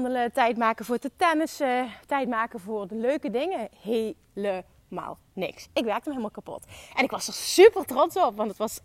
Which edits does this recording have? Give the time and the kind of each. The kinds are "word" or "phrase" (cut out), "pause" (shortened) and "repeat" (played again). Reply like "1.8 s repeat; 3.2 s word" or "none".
none